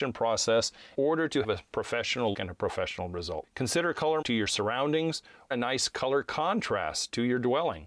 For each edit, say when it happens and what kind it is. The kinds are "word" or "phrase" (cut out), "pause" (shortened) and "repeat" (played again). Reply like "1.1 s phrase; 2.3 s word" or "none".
0.9 s word; 1.4 s word; 2.3 s word; 4.2 s word; 5.5 s word